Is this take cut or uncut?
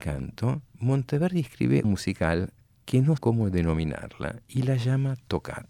cut